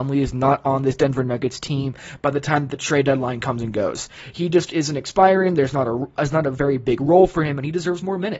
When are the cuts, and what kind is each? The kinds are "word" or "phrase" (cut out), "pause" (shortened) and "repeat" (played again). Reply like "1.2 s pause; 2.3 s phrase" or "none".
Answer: none